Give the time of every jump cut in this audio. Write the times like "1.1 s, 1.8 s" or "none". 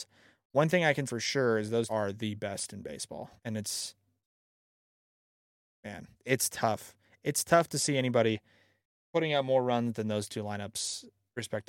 1.1 s, 1.9 s, 3.4 s, 6.1 s

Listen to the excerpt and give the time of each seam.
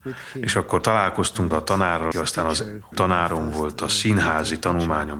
1.5 s, 2.1 s, 2.9 s

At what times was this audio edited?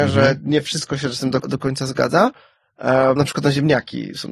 1.4 s, 3.2 s

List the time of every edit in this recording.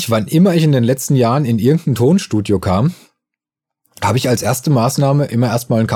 none

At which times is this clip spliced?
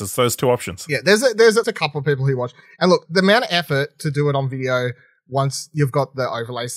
1.6 s, 3.0 s

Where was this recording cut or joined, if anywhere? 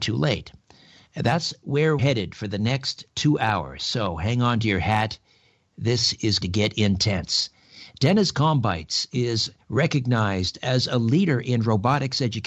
2.0 s, 6.4 s, 9.6 s

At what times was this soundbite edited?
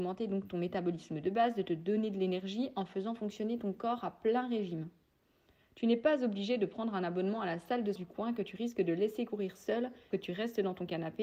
8.0 s, 10.1 s

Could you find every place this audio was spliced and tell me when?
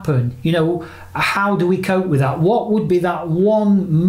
none

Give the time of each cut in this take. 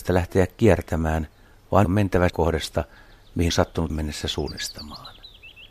1.8 s, 2.3 s, 3.5 s, 3.9 s

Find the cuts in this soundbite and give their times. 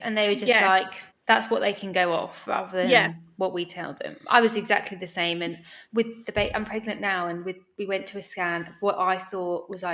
1.1 s, 5.8 s

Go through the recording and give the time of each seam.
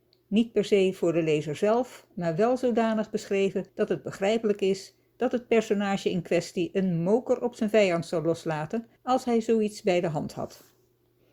3.7 s, 9.0 s

